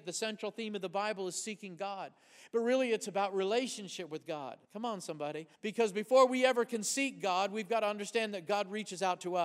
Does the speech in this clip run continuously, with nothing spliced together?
no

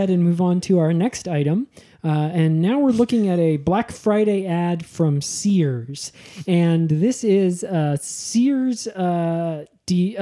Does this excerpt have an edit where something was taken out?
no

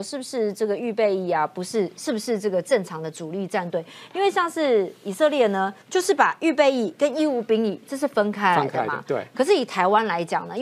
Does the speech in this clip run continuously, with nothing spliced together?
no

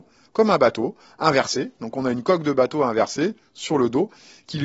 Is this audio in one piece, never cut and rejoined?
yes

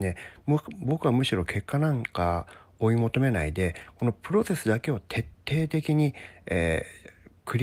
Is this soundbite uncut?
yes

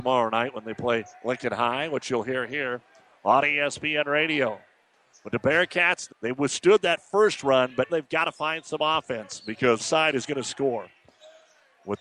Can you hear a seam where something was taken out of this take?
yes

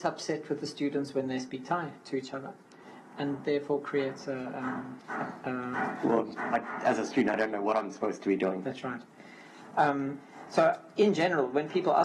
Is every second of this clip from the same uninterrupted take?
no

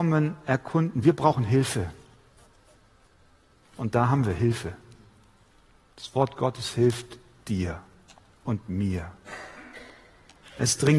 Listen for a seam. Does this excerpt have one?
no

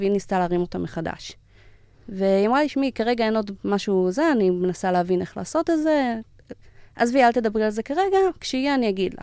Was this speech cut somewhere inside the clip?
no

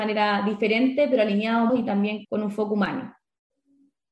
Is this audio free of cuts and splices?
no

